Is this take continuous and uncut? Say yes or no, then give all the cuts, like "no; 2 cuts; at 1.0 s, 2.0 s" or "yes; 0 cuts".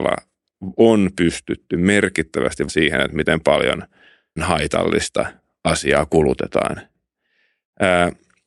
no; 2 cuts; at 2.7 s, 4.4 s